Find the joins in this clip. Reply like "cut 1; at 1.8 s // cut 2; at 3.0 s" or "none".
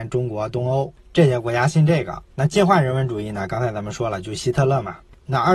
cut 1; at 2.3 s